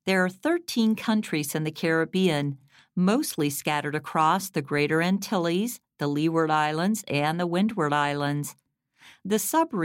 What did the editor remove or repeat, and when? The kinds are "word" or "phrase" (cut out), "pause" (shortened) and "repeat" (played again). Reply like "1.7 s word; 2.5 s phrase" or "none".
none